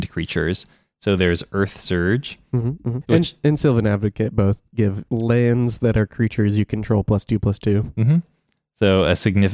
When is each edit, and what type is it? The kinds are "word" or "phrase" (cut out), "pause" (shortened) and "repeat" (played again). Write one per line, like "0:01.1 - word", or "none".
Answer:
none